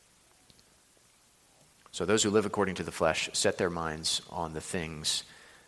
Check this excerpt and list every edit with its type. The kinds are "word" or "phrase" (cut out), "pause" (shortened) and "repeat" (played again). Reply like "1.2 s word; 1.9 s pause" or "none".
none